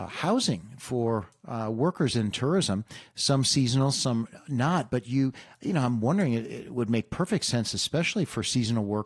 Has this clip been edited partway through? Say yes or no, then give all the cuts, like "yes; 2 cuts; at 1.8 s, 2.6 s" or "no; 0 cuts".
no; 0 cuts